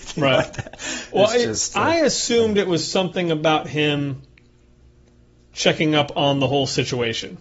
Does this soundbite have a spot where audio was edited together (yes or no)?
no